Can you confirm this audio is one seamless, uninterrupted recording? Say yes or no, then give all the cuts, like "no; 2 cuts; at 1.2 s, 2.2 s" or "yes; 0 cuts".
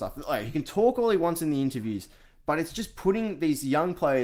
yes; 0 cuts